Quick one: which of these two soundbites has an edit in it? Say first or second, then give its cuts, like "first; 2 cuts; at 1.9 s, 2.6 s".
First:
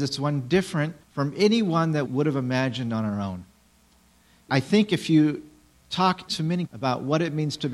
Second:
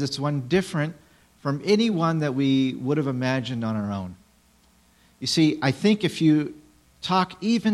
first; 5 cuts; at 1.0 s, 2.1 s, 4.5 s, 6.3 s, 6.7 s